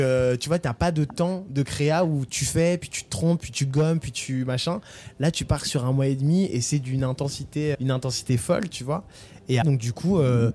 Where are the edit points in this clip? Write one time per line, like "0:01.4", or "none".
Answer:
0:07.7
0:09.6